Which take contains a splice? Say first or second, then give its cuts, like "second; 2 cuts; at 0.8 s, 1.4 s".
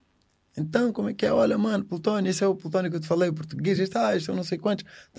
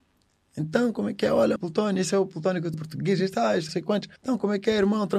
second; 4 cuts; at 1.6 s, 2.7 s, 3.7 s, 4.2 s